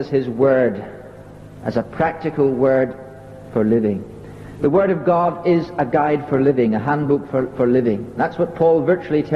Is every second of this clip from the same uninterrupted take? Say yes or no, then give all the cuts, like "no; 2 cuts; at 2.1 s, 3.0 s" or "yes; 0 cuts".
yes; 0 cuts